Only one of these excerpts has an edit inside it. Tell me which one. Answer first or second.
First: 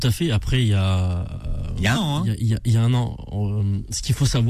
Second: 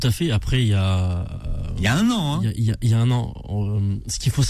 first